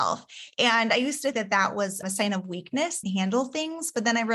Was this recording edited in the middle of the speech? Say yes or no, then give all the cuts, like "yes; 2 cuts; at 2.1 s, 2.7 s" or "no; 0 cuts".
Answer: yes; 3 cuts; at 1.3 s, 2.0 s, 3.0 s